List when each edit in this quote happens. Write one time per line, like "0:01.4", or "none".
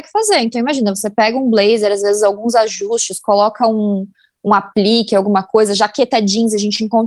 none